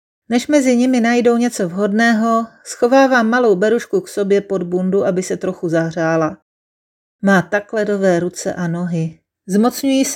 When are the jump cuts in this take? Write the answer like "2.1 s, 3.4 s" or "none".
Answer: none